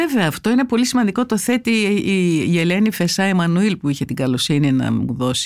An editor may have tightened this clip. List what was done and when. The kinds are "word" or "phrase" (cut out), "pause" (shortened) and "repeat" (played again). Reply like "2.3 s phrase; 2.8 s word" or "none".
none

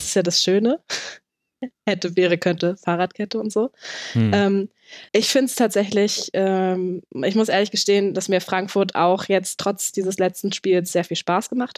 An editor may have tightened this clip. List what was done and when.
5.1 s pause

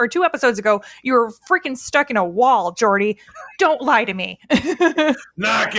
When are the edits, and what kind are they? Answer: none

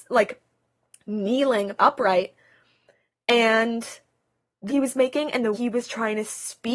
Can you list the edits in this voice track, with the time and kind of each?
1.8 s word; 4.7 s word; 5.5 s word

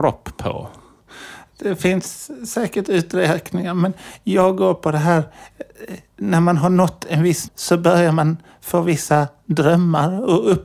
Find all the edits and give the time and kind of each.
7.5 s word

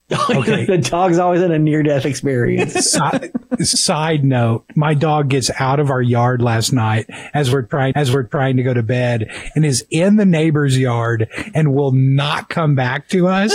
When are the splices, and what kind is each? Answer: 7.9 s repeat

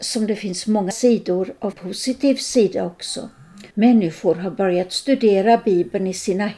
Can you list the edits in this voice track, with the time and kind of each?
0.9 s word; 1.7 s phrase; 3.7 s pause

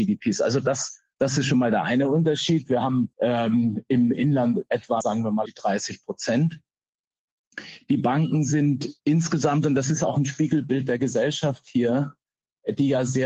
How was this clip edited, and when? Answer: 1.1 s pause; 3.1 s pause; 4.1 s word; 5.0 s phrase; 5.5 s word; 9.0 s pause

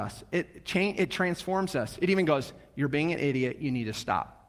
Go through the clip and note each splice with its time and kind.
none

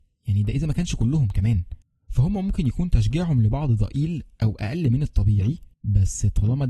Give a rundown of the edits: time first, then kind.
1.8 s pause; 5.7 s pause

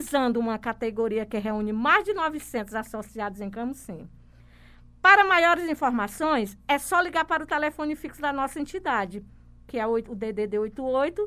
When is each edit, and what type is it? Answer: none

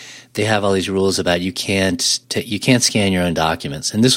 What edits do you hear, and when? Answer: 2.2 s pause

